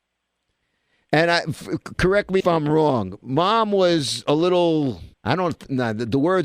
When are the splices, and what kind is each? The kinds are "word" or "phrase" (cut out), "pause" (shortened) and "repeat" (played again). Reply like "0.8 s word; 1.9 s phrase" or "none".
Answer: 2.4 s word; 5.1 s pause